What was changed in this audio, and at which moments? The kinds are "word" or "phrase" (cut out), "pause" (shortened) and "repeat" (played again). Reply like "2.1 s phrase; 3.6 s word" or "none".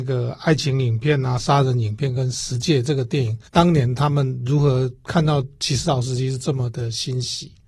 3.5 s pause